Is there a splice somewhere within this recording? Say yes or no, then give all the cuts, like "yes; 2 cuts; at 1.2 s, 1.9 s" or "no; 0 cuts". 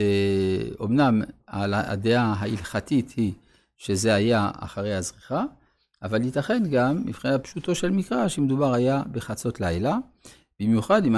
no; 0 cuts